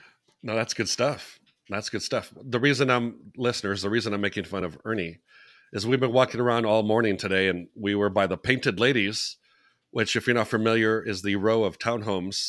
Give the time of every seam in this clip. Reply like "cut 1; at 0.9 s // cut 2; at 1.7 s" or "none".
none